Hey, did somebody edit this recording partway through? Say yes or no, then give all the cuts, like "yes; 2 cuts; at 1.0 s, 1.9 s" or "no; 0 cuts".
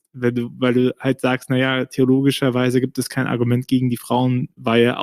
no; 0 cuts